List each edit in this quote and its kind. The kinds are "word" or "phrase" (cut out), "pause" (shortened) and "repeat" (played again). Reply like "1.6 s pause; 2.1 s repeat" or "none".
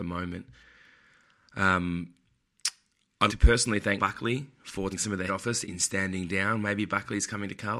3.3 s word; 4.0 s word; 4.9 s word; 5.3 s word; 5.6 s word